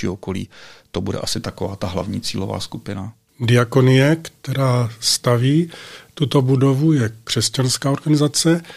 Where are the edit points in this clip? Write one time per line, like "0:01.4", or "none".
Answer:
0:03.3